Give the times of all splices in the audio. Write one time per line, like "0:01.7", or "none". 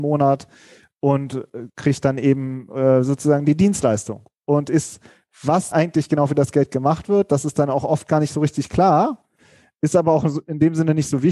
0:05.7